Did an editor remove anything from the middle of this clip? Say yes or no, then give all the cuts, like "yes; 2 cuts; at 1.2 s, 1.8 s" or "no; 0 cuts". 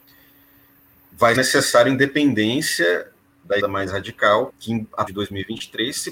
yes; 4 cuts; at 1.4 s, 3.6 s, 4.5 s, 5.1 s